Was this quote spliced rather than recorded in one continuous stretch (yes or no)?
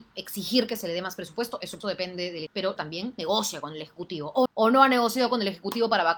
yes